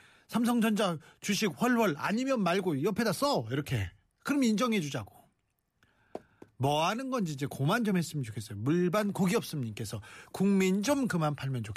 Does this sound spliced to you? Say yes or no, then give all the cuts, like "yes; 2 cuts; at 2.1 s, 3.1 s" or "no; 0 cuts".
no; 0 cuts